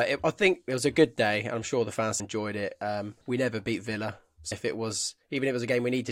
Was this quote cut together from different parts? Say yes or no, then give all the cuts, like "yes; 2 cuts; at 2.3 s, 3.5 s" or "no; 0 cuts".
yes; 3 cuts; at 2.2 s, 3.2 s, 4.5 s